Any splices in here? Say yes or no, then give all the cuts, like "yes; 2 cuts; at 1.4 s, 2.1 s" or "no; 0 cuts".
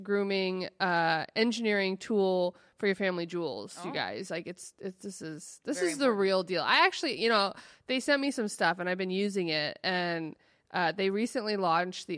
no; 0 cuts